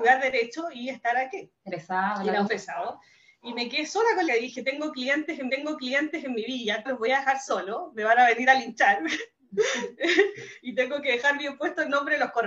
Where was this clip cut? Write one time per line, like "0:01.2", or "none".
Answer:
0:01.7
0:02.5
0:04.3
0:05.5
0:06.8